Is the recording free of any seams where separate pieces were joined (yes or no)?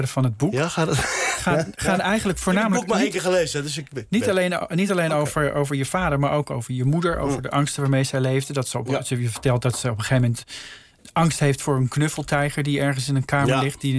yes